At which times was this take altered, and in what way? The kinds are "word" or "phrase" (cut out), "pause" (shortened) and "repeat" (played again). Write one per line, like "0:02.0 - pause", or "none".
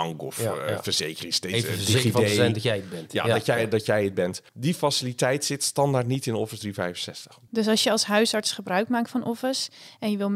0:04.5 - pause